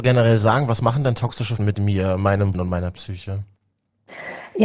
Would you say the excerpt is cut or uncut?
cut